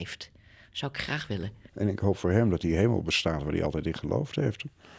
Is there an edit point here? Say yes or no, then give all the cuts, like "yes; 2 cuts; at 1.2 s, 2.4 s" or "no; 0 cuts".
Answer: yes; 1 cut; at 1.7 s